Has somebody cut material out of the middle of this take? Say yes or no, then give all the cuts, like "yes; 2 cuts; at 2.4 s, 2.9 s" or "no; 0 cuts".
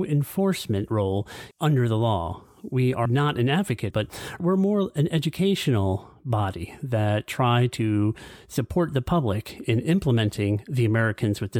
yes; 4 cuts; at 1.5 s, 3.1 s, 3.9 s, 4.4 s